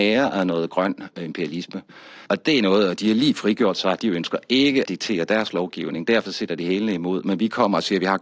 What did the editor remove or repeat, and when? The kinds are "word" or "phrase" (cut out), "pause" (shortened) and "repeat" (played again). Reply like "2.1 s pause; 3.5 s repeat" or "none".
2.3 s pause; 4.9 s phrase; 6.3 s word